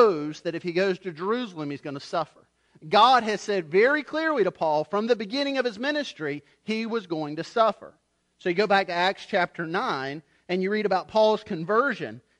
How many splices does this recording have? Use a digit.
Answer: 0